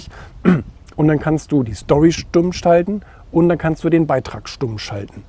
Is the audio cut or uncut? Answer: uncut